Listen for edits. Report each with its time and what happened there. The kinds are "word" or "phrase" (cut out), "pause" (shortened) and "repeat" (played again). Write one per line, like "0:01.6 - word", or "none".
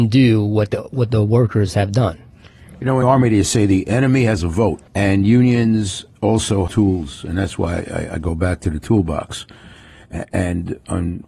0:03.0 - word
0:04.9 - pause
0:06.7 - word